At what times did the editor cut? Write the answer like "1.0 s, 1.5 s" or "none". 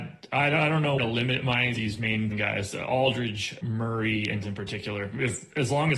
1.0 s, 1.8 s, 2.3 s, 3.6 s, 4.4 s